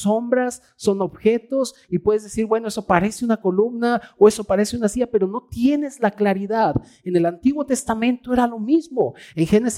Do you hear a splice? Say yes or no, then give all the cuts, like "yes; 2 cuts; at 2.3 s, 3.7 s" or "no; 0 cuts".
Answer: no; 0 cuts